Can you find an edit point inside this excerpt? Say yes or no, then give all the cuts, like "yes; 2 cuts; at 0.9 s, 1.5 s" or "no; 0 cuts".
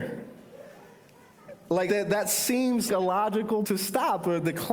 yes; 3 cuts; at 1.9 s, 2.9 s, 3.6 s